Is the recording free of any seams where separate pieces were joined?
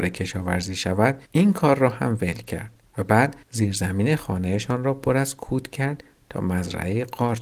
no; 2 cuts; at 1.3 s, 3.4 s

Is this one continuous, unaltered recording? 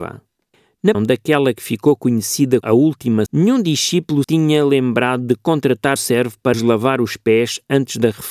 no; 6 cuts; at 0.9 s, 2.6 s, 3.3 s, 4.2 s, 6.0 s, 6.5 s

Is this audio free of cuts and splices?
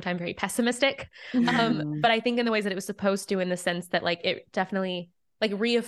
yes; 0 cuts

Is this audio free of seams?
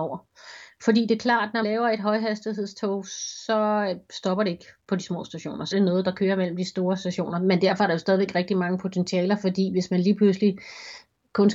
no; 2 cuts; at 1.6 s, 5.7 s

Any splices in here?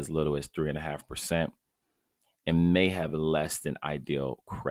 no; 0 cuts

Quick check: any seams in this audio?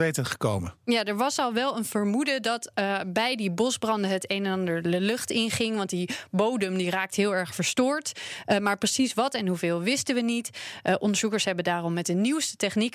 no; 0 cuts

